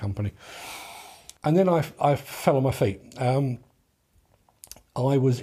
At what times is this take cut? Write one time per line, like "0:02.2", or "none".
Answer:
0:01.4